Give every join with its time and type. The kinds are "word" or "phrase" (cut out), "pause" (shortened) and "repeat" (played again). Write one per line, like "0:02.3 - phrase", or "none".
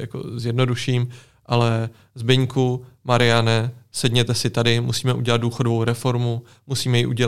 none